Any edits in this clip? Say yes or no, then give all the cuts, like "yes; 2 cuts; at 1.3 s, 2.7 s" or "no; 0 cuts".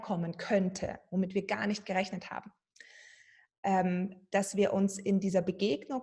no; 0 cuts